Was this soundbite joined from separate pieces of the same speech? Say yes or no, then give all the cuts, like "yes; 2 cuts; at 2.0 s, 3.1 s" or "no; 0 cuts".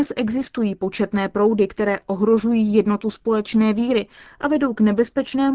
no; 0 cuts